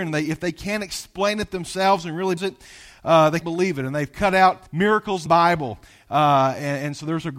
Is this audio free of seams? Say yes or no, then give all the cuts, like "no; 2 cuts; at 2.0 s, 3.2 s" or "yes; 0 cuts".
no; 4 cuts; at 2.4 s, 3.4 s, 4.7 s, 5.3 s